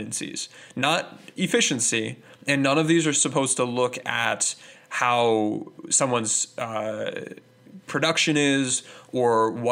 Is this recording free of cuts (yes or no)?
yes